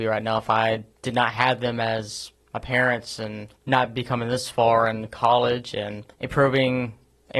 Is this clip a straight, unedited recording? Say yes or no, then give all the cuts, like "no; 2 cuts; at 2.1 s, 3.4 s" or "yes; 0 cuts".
no; 1 cut; at 6.1 s